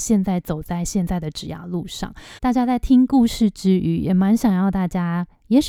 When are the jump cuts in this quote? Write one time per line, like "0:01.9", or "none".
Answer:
0:02.4